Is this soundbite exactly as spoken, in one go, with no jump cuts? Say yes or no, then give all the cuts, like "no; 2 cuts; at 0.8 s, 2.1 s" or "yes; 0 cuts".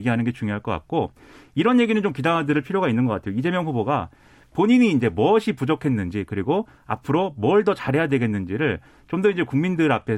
yes; 0 cuts